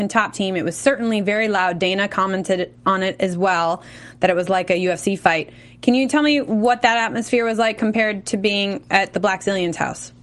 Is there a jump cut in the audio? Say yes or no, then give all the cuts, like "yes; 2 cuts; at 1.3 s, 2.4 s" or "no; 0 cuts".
no; 0 cuts